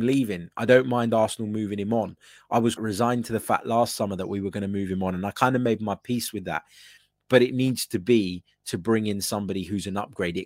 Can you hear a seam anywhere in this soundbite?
yes; 1 cut; at 2.8 s

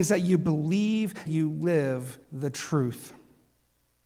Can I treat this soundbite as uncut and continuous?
no; 2 cuts; at 1.3 s, 2.2 s

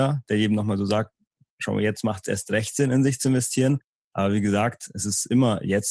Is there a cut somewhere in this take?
no; 0 cuts

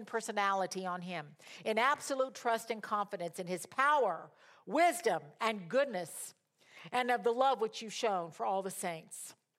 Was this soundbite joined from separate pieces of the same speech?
no; 0 cuts

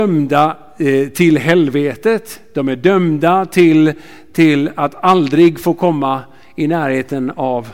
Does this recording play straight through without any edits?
yes; 0 cuts

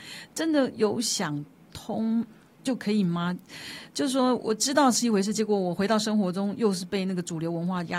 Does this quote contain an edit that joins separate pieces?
no; 0 cuts

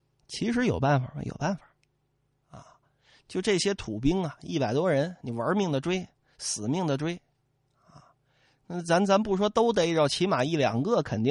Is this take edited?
no; 0 cuts

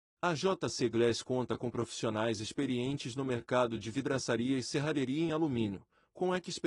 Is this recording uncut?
yes; 0 cuts

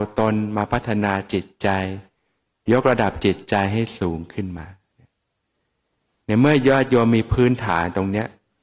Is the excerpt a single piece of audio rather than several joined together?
yes; 0 cuts

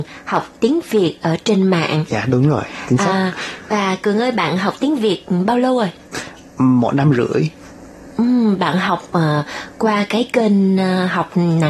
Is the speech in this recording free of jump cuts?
yes; 0 cuts

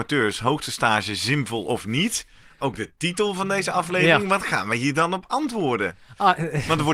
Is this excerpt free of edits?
yes; 0 cuts

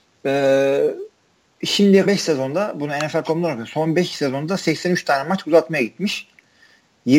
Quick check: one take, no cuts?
no; 1 cut; at 2.1 s

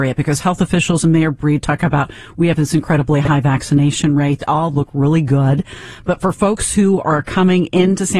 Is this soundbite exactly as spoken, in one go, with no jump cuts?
no; 1 cut; at 4.7 s

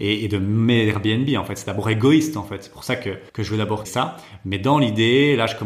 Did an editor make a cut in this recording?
yes; 2 cuts; at 3.3 s, 3.8 s

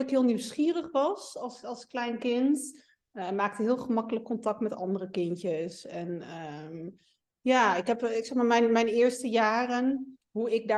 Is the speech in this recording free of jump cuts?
yes; 0 cuts

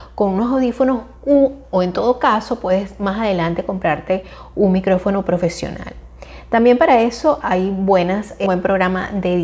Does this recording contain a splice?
no; 0 cuts

